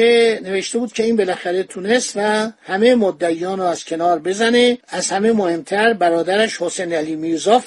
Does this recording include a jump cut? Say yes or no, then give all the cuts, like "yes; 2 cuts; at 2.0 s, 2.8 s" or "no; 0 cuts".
yes; 1 cut; at 4.8 s